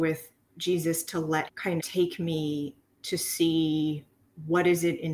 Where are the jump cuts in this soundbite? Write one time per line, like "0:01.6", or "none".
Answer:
0:01.5
0:01.8
0:02.8